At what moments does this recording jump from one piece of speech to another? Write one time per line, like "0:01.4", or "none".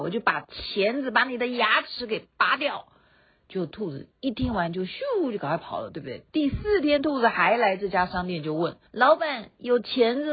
0:08.9